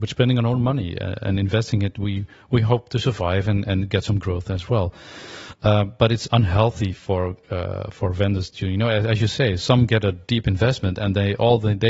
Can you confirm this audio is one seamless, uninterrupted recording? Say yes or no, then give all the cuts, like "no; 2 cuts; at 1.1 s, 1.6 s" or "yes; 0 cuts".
yes; 0 cuts